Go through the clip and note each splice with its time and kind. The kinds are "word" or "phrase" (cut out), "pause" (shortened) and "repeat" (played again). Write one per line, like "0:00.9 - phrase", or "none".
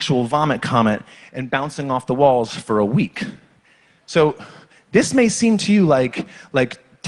none